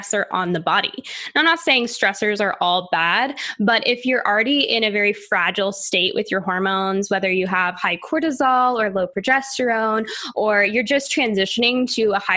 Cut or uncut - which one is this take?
uncut